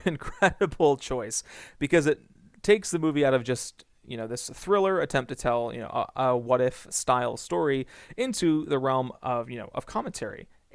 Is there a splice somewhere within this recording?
no; 0 cuts

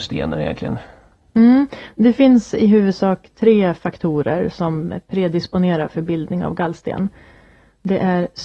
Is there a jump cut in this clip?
no; 0 cuts

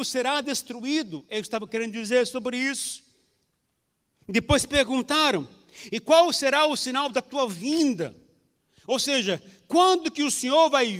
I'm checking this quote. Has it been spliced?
no; 0 cuts

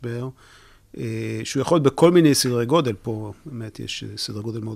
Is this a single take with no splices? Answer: yes; 0 cuts

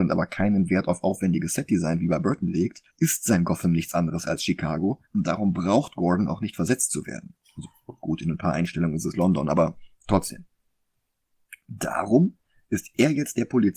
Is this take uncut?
no; 2 cuts; at 2.9 s, 5.1 s

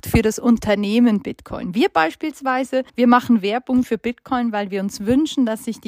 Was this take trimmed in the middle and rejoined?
yes; 1 cut; at 2.9 s

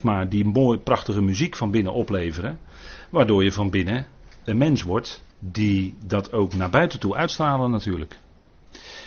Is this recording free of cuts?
no; 2 cuts; at 5.3 s, 7.3 s

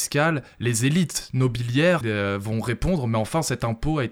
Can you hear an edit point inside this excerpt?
yes; 1 cut; at 2.0 s

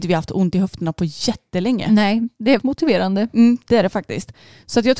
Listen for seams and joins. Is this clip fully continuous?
no; 1 cut; at 2.6 s

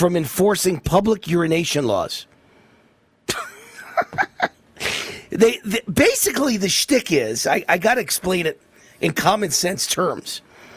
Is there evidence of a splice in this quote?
no; 0 cuts

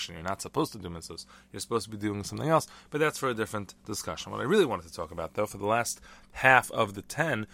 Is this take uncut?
yes; 0 cuts

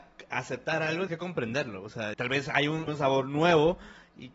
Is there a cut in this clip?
yes; 3 cuts; at 1.1 s, 2.1 s, 2.9 s

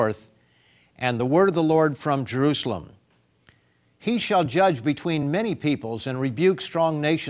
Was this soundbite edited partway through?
no; 0 cuts

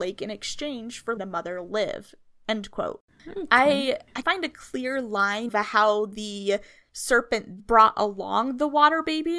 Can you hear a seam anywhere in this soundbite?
yes; 4 cuts; at 1.2 s, 4.2 s, 5.5 s, 7.6 s

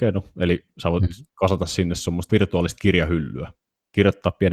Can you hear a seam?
yes; 2 cuts; at 1.3 s, 2.3 s

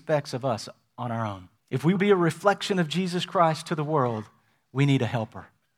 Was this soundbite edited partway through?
yes; 2 cuts; at 1.6 s, 2.0 s

